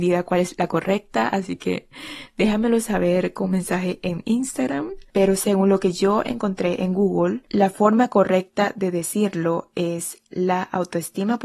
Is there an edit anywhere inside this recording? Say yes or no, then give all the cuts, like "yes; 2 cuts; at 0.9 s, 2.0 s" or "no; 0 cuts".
no; 0 cuts